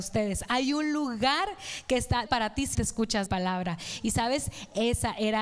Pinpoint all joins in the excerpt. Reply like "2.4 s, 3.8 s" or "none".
2.3 s, 2.7 s, 3.3 s